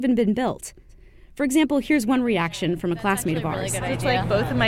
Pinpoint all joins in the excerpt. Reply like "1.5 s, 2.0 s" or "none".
none